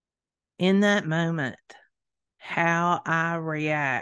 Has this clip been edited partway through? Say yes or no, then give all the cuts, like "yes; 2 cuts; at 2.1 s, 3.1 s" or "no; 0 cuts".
no; 0 cuts